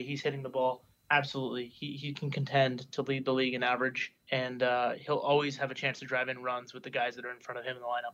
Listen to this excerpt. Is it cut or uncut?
cut